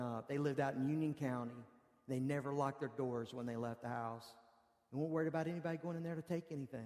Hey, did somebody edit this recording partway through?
no; 0 cuts

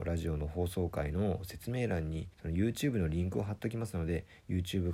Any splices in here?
yes; 1 cut; at 2.3 s

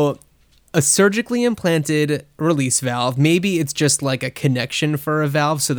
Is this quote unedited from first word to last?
yes; 0 cuts

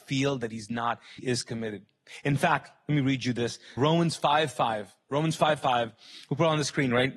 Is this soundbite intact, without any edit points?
no; 2 cuts; at 1.2 s, 3.8 s

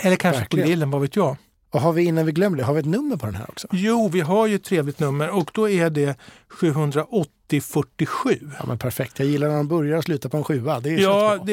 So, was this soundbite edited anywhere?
no; 0 cuts

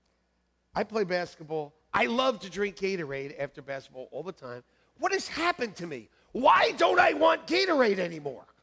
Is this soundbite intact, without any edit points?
yes; 0 cuts

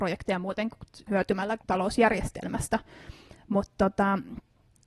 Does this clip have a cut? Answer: yes; 2 cuts; at 1.1 s, 1.6 s

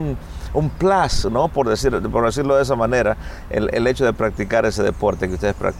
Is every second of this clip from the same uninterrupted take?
yes; 0 cuts

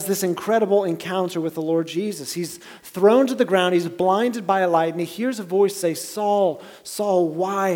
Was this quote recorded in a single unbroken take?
yes; 0 cuts

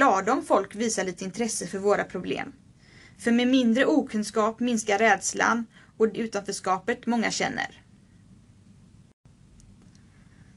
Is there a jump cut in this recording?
yes; 1 cut; at 6.1 s

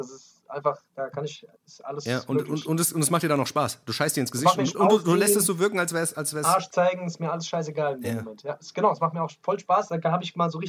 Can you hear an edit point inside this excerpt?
yes; 2 cuts; at 1.6 s, 4.7 s

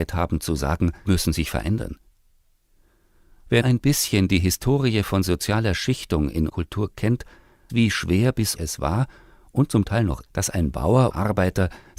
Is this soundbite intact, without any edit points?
no; 7 cuts; at 1.1 s, 3.6 s, 6.5 s, 7.7 s, 8.6 s, 10.3 s, 11.1 s

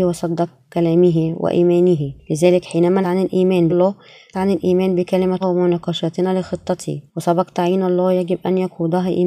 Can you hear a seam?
yes; 6 cuts; at 2.2 s, 3.0 s, 3.7 s, 4.3 s, 5.4 s, 7.1 s

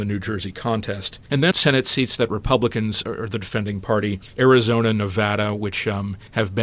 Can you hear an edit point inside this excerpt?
yes; 3 cuts; at 1.5 s, 3.0 s, 4.4 s

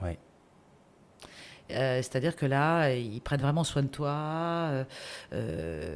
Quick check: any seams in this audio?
no; 0 cuts

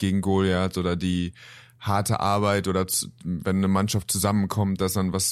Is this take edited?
no; 0 cuts

